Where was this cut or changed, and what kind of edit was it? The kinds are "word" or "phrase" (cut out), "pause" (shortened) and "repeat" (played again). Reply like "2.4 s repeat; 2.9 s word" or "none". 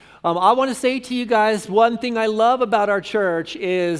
none